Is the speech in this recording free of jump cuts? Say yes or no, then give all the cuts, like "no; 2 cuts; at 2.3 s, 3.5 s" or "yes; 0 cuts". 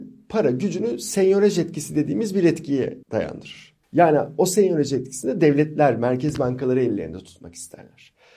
no; 1 cut; at 3.0 s